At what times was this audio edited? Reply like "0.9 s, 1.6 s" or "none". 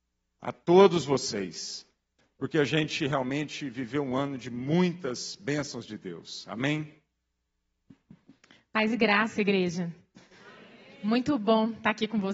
none